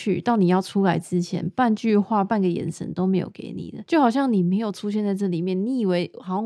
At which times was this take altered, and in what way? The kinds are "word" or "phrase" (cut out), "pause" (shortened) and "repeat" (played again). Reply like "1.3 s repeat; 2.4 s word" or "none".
none